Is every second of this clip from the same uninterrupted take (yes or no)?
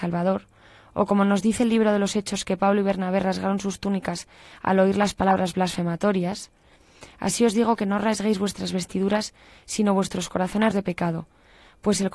no